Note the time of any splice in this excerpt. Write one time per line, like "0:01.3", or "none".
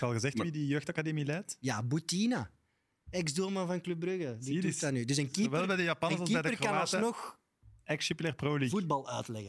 none